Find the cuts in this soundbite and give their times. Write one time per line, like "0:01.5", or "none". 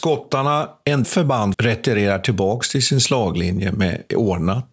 0:01.0
0:01.5